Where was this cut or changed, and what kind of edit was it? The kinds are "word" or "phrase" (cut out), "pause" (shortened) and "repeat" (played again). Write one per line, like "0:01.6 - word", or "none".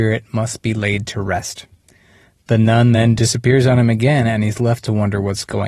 none